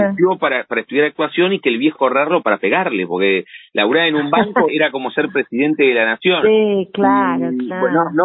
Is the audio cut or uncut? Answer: cut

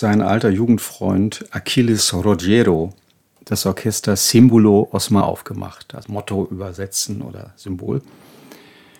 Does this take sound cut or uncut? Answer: cut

